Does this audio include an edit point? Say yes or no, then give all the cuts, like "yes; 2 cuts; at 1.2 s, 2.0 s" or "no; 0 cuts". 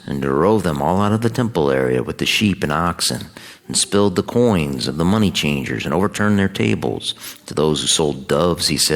no; 0 cuts